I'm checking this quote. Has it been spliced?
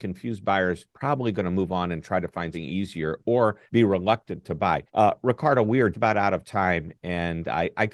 yes; 5 cuts; at 0.9 s, 2.5 s, 3.7 s, 4.9 s, 5.9 s

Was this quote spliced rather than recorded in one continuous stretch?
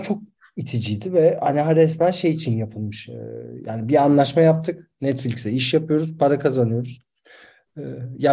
no; 0 cuts

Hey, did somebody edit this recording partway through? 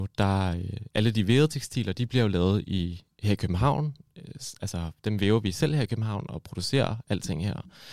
no; 0 cuts

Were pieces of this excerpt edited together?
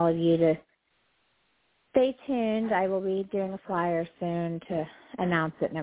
no; 0 cuts

